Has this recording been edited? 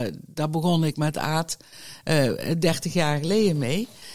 no; 0 cuts

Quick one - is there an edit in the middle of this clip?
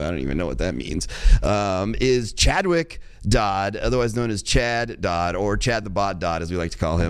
no; 0 cuts

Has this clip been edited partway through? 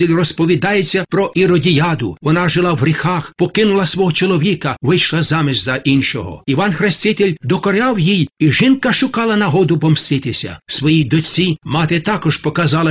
no; 0 cuts

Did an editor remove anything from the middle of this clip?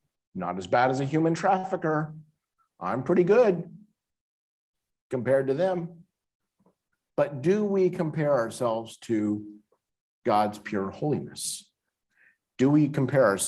no; 0 cuts

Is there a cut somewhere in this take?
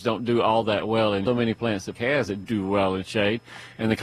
yes; 3 cuts; at 1.3 s, 2.0 s, 2.4 s

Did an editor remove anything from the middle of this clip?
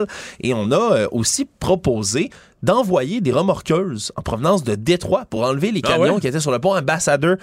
no; 0 cuts

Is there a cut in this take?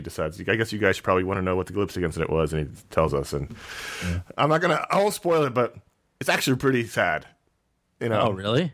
no; 0 cuts

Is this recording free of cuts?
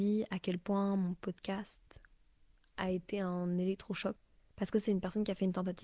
yes; 0 cuts

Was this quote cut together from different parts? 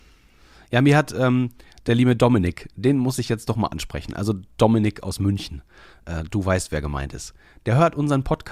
no; 0 cuts

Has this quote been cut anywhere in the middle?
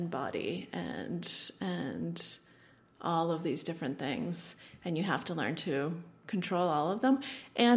no; 0 cuts

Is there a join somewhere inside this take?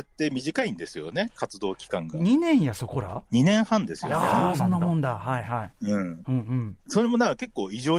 yes; 3 cuts; at 3.2 s, 5.8 s, 6.8 s

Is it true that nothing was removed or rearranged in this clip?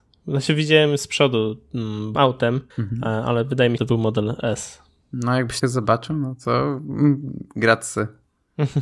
no; 5 cuts; at 2.2 s, 2.7 s, 3.8 s, 5.0 s, 5.6 s

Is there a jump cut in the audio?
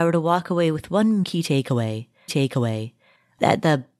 yes; 2 cuts; at 1.2 s, 2.3 s

